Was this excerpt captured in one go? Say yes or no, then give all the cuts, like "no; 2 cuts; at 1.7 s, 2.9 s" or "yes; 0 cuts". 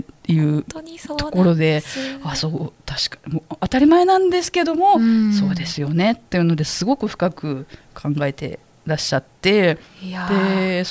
no; 1 cut; at 7.8 s